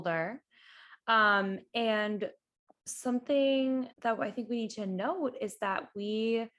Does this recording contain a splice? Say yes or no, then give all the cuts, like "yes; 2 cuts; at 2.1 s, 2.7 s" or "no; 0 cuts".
yes; 1 cut; at 3.9 s